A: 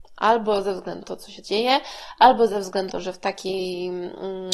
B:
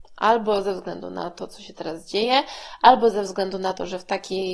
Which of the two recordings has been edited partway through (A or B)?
A